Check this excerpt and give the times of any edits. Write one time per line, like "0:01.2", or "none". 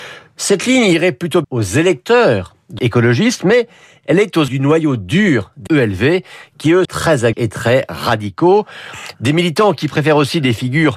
0:01.4
0:02.8
0:04.5
0:05.7
0:06.8
0:07.3

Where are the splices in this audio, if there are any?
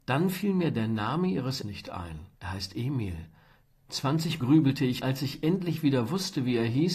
0:01.6
0:02.3
0:04.4
0:05.0

